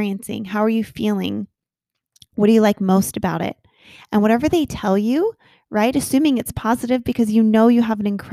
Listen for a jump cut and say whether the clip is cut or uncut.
uncut